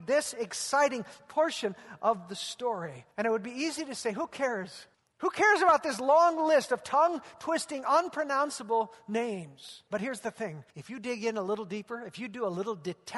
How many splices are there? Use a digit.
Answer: 4